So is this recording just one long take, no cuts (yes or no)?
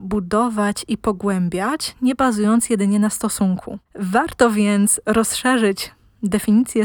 no